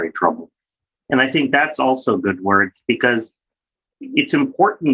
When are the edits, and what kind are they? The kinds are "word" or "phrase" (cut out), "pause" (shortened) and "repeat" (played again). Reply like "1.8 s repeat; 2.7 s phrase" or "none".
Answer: none